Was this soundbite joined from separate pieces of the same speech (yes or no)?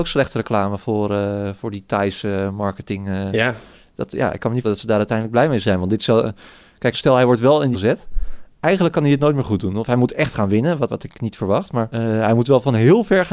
yes